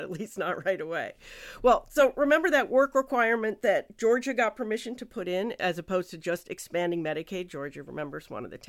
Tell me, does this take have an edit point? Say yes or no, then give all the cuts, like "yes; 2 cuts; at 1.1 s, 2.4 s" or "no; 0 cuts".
no; 0 cuts